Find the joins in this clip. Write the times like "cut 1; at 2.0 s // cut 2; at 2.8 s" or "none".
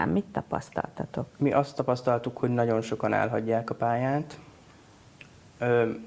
cut 1; at 1.3 s